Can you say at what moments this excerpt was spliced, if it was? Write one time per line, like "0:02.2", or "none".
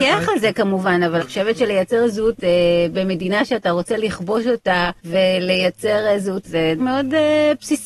0:01.2
0:02.4
0:05.0
0:06.4
0:06.8